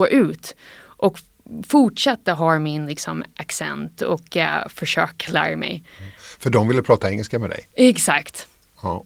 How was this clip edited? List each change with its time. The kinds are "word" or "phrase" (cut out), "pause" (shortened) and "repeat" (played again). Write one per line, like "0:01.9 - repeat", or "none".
none